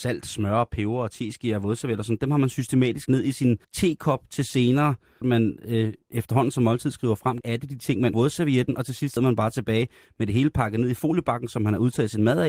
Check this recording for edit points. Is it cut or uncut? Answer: cut